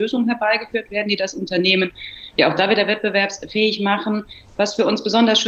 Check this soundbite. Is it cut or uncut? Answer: uncut